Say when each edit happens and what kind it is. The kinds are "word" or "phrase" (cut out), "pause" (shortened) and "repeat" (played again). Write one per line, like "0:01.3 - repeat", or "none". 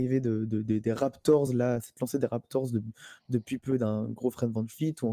none